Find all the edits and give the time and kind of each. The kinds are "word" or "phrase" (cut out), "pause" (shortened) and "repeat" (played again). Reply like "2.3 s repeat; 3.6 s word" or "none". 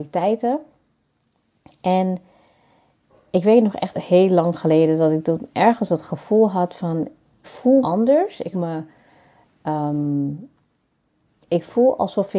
3.9 s word; 7.4 s word; 7.8 s word; 8.5 s word